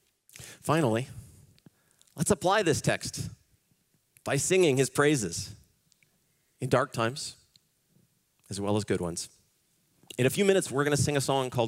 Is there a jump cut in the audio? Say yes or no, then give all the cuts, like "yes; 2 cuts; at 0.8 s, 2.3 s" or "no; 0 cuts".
no; 0 cuts